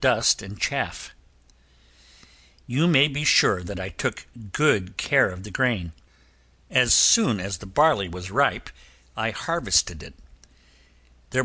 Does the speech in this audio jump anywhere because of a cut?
no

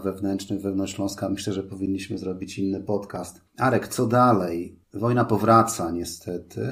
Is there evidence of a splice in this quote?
yes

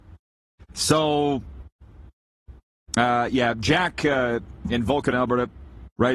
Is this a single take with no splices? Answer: yes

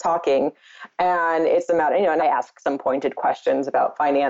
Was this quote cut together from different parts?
no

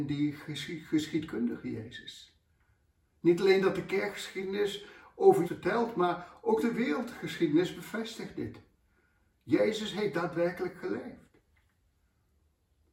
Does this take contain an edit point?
yes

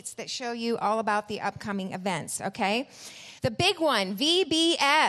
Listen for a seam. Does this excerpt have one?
yes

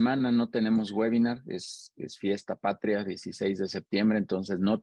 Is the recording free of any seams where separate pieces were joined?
yes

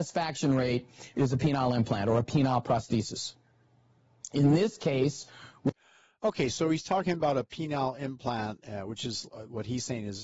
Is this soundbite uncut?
yes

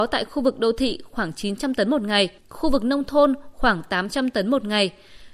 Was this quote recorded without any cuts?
no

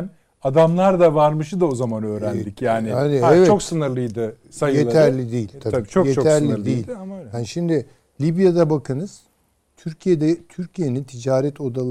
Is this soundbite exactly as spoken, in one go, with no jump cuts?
no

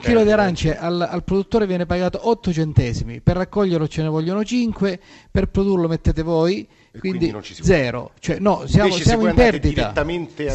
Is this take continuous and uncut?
yes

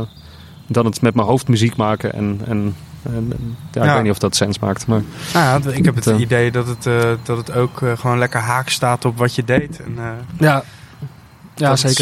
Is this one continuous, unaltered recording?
yes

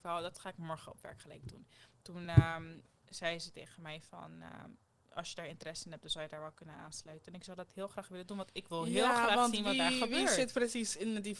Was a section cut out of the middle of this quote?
no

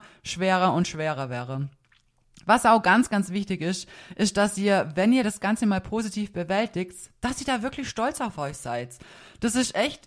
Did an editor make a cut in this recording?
no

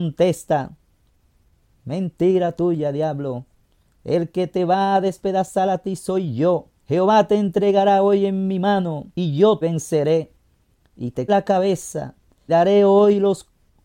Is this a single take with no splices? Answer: no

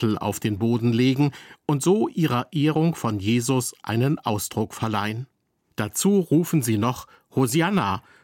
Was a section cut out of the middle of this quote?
no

